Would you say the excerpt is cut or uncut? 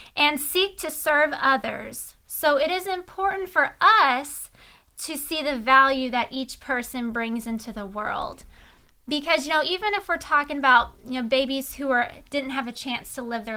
uncut